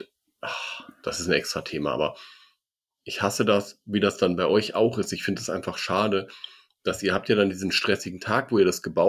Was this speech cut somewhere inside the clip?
no; 0 cuts

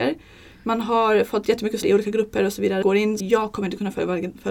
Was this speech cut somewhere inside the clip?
yes; 3 cuts; at 1.8 s, 2.8 s, 3.2 s

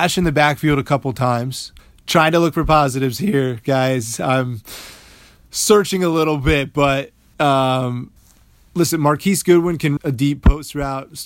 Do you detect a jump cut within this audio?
yes; 1 cut; at 10.0 s

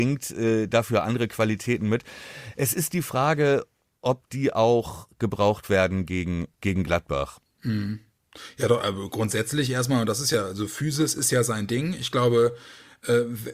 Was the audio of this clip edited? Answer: yes; 1 cut; at 6.5 s

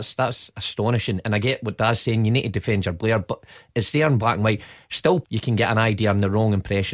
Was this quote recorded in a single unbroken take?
no; 1 cut; at 5.2 s

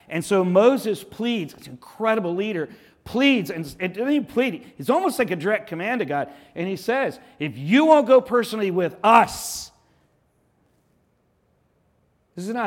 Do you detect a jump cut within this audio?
no; 0 cuts

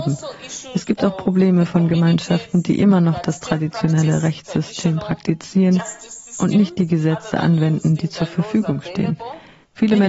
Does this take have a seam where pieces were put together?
no; 0 cuts

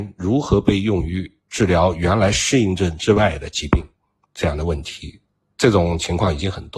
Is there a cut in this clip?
no; 0 cuts

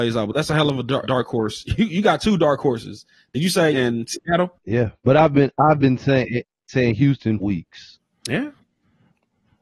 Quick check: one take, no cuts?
no; 4 cuts; at 1.0 s, 3.7 s, 5.0 s, 7.4 s

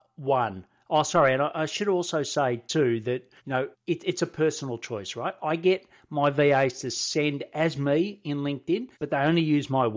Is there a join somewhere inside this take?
yes; 3 cuts; at 3.4 s, 3.7 s, 8.9 s

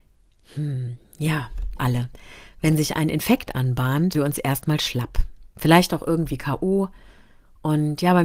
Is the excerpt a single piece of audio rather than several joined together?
no; 2 cuts; at 1.8 s, 4.1 s

